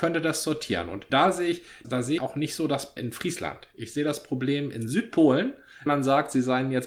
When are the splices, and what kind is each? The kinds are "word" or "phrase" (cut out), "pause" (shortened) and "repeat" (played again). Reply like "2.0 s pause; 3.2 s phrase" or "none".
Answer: 1.1 s word; 1.8 s word; 2.2 s word; 3.0 s word; 5.9 s word